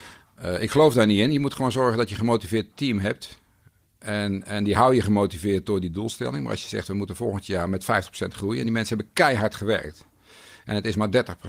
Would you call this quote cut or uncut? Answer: uncut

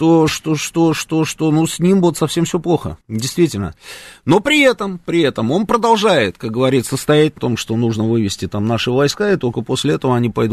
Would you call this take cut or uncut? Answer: cut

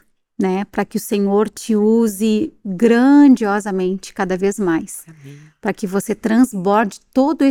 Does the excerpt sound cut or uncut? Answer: uncut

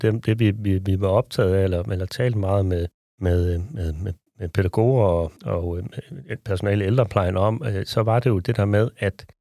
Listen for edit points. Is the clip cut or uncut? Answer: cut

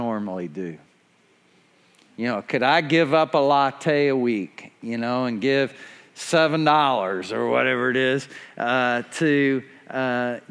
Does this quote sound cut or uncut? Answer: uncut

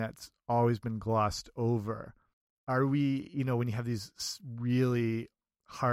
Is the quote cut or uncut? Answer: cut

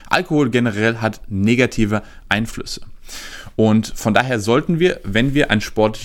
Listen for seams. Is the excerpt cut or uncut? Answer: uncut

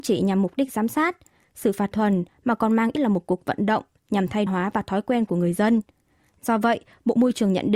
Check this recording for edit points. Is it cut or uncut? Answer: cut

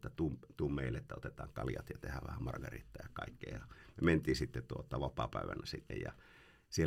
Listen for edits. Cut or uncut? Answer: cut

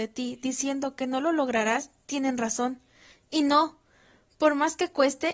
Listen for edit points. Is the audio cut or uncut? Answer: uncut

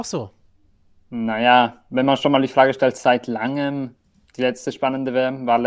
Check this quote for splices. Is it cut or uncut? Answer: uncut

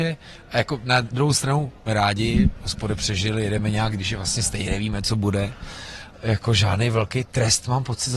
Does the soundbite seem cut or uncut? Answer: cut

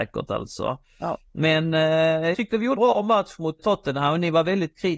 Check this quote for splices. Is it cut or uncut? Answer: cut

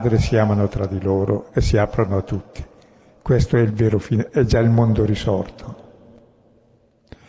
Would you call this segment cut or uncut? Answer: uncut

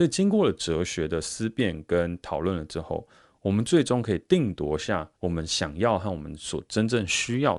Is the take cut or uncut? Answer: cut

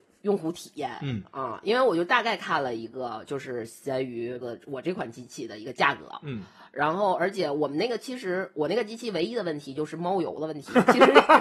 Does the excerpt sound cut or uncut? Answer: cut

